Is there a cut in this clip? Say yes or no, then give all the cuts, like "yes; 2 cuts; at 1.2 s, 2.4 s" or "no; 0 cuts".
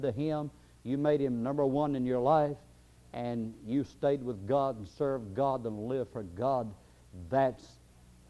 no; 0 cuts